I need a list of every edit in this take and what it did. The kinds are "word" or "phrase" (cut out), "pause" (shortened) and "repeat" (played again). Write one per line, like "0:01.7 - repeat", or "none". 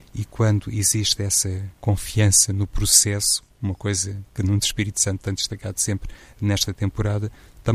0:01.8 - pause